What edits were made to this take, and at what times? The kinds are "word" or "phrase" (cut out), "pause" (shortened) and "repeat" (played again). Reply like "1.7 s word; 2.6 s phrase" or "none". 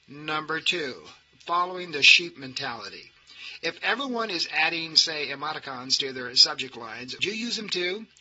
7.2 s word

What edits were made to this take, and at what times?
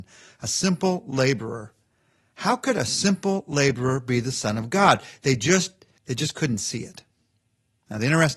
none

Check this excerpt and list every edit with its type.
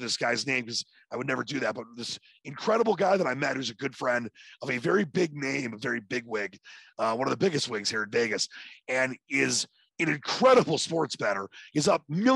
none

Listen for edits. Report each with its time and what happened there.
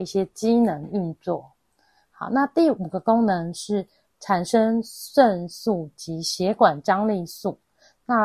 none

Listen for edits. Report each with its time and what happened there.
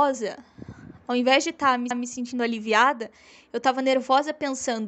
1.9 s repeat

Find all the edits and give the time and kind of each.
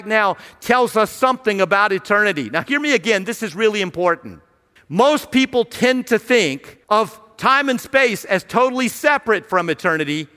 4.8 s pause; 6.8 s pause

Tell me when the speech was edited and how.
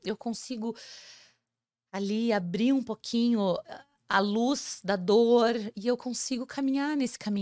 none

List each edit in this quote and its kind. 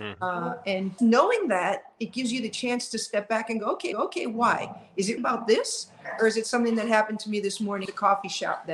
1.0 s word; 3.9 s repeat; 5.2 s word; 7.9 s word

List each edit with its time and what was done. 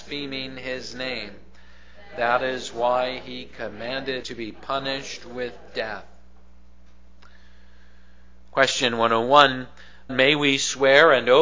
4.2 s word; 10.1 s word

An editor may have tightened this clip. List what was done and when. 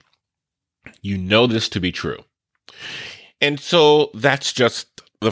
none

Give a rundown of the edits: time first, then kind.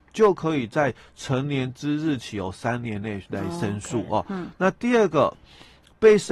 3.3 s pause

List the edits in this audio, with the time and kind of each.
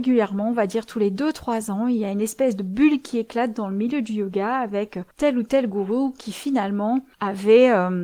5.1 s pause; 7.1 s pause

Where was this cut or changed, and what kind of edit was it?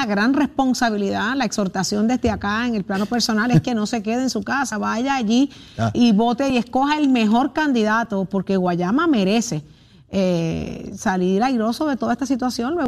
5.9 s word

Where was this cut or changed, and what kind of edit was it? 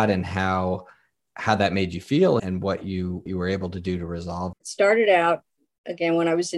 2.4 s word; 3.3 s word; 4.5 s word

